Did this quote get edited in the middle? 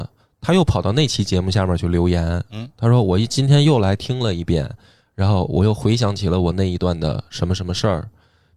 no; 0 cuts

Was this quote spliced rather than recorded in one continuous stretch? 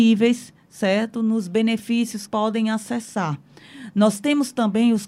yes; 1 cut; at 2.3 s

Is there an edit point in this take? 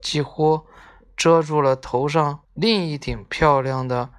yes; 1 cut; at 2.4 s

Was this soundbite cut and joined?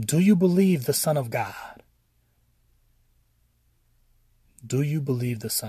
no; 0 cuts

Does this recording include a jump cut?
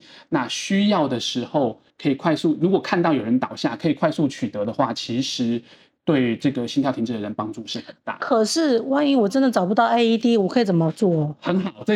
yes; 1 cut; at 1.9 s

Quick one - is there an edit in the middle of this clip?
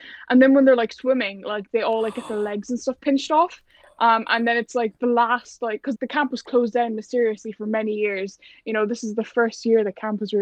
yes; 1 cut; at 5.9 s

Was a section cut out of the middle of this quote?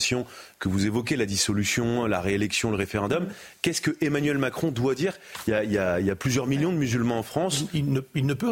no; 0 cuts

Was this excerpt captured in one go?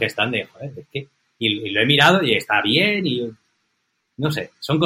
yes; 0 cuts

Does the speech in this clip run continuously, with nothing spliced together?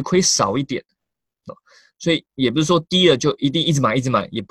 yes; 0 cuts

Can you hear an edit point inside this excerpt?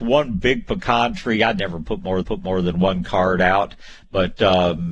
yes; 1 cut; at 2.2 s

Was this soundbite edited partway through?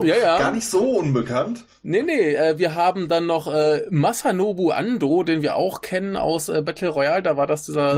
no; 0 cuts

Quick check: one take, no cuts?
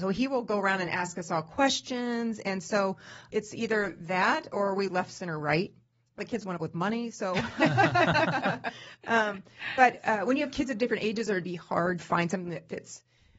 no; 6 cuts; at 3.3 s, 4.9 s, 6.2 s, 6.6 s, 11.4 s, 12.0 s

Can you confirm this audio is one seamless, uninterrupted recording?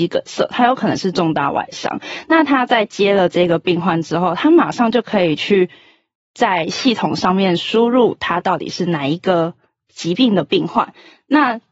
yes; 0 cuts

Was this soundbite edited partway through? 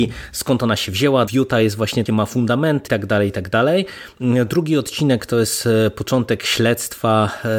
yes; 3 cuts; at 1.3 s, 2.1 s, 2.9 s

